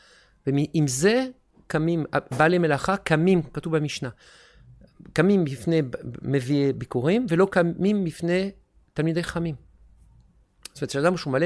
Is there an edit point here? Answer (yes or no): no